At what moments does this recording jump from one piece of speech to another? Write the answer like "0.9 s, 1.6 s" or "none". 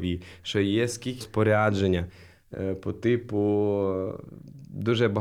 1.2 s